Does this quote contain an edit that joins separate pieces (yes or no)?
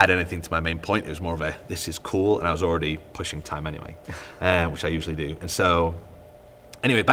no